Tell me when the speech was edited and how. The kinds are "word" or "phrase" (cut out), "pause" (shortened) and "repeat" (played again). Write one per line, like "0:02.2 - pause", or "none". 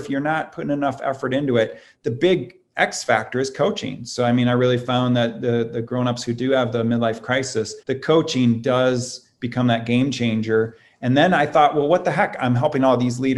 0:07.8 - pause